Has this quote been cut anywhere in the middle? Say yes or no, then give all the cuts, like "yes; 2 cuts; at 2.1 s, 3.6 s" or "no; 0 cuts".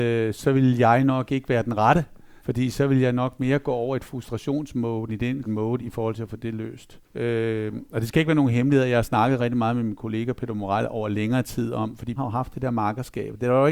yes; 6 cuts; at 2.4 s, 5.1 s, 5.4 s, 7.0 s, 9.4 s, 12.2 s